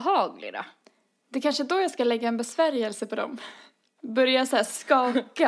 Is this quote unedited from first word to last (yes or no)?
yes